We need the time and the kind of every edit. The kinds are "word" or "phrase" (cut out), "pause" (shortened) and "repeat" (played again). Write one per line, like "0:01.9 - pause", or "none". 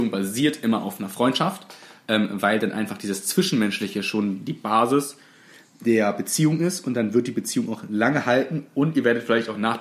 none